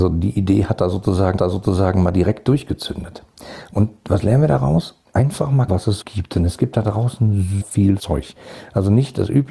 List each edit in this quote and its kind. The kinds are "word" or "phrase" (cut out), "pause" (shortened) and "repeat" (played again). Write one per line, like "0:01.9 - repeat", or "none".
0:01.4 - repeat
0:05.1 - pause
0:05.7 - word
0:06.0 - word
0:07.6 - word
0:08.0 - word